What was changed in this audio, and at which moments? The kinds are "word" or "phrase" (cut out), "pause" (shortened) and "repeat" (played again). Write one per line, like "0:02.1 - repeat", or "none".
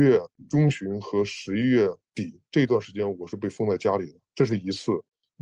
0:02.5 - pause
0:04.2 - pause